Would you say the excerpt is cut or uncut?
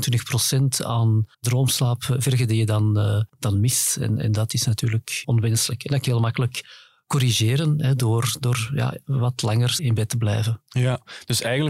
cut